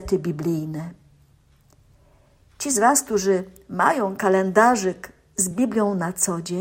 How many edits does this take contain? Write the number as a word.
zero